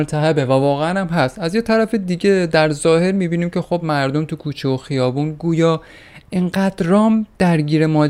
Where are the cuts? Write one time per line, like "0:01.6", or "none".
none